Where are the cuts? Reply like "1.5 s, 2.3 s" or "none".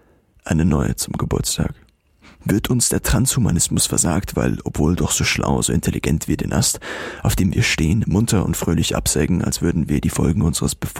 none